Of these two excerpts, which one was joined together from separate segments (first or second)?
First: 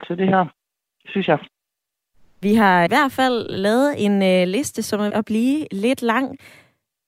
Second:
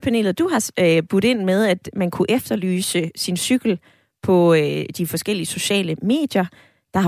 first